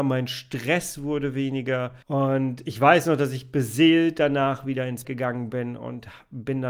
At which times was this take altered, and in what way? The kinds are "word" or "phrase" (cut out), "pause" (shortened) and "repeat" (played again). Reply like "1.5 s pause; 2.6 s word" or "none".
2.0 s pause; 5.0 s word